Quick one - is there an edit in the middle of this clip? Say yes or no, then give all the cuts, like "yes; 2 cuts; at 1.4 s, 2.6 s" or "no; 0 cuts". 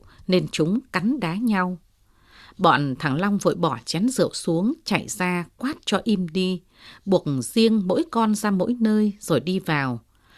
no; 0 cuts